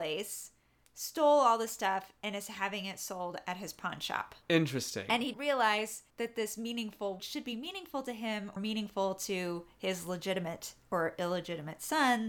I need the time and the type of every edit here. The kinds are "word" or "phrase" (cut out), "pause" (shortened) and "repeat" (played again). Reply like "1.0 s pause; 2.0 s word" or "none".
4.4 s pause; 5.3 s word; 6.1 s pause; 7.2 s phrase; 8.6 s word